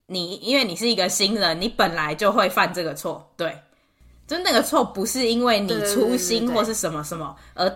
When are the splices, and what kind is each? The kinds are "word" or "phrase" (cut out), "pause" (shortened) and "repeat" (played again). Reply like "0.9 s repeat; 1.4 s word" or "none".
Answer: none

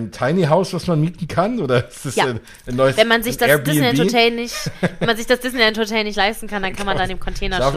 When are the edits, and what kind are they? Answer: none

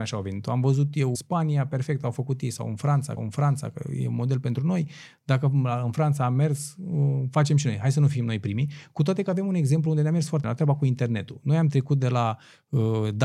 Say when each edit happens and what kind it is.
1.1 s word; 3.2 s repeat; 10.4 s word

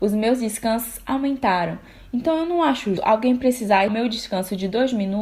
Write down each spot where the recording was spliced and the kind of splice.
3.0 s word; 3.9 s word

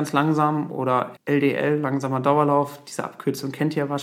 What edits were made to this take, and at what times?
1.2 s word

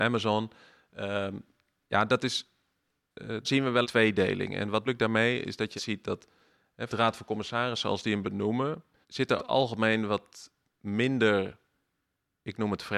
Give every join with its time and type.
3.4 s word; 3.8 s word; 4.9 s word; 5.8 s word; 6.9 s word; 8.2 s word; 9.0 s word; 9.4 s word

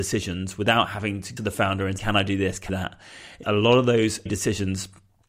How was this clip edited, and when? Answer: 1.4 s phrase; 2.0 s word; 2.7 s phrase; 3.4 s word; 4.3 s word

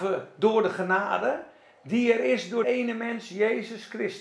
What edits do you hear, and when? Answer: 2.6 s word

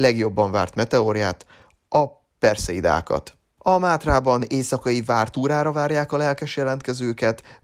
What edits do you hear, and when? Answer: none

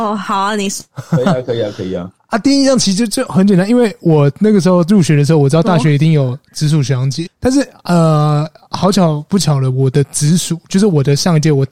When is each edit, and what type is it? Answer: 7.3 s word

